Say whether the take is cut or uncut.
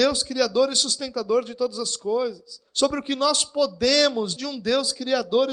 cut